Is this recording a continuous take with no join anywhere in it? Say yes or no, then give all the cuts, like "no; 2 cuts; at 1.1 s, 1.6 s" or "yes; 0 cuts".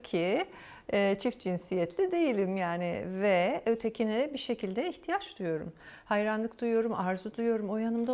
yes; 0 cuts